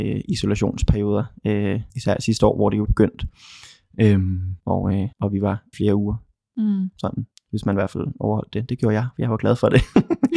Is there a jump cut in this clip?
yes; 6 cuts; at 1.9 s, 2.8 s, 4.6 s, 5.1 s, 5.7 s, 7.3 s

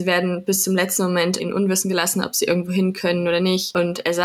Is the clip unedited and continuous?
no; 1 cut; at 1.4 s

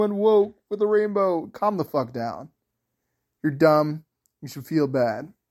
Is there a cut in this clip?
no; 0 cuts

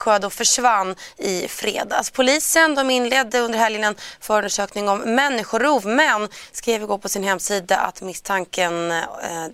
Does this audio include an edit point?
no; 0 cuts

